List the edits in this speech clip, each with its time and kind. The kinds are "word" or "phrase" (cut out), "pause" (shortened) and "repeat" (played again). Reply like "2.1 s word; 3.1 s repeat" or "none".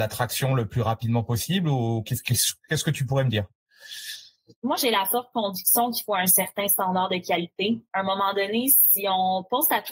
none